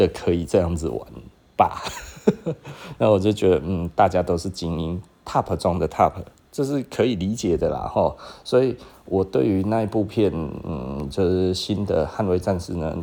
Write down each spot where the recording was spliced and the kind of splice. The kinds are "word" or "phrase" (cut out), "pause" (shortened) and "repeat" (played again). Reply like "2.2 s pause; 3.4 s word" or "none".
none